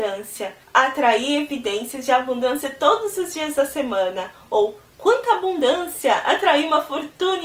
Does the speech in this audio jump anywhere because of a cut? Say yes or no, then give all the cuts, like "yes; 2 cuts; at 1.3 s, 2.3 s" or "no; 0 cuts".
no; 0 cuts